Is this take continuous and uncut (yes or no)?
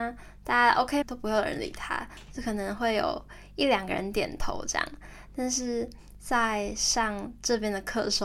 no